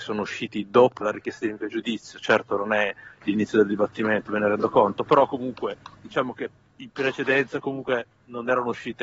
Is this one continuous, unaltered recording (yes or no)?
no